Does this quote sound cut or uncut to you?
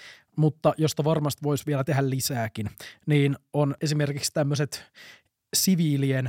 uncut